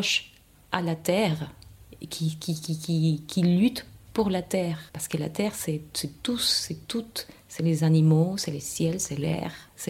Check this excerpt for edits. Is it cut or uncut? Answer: cut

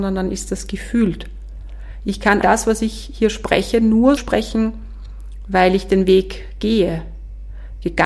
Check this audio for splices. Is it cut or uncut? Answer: cut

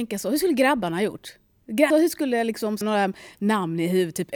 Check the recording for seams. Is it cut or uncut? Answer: cut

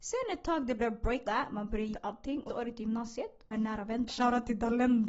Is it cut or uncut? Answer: cut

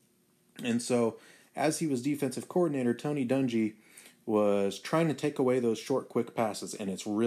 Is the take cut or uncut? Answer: uncut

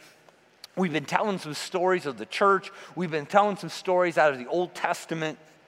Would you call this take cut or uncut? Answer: uncut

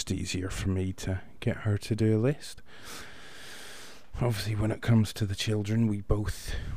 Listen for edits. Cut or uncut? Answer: uncut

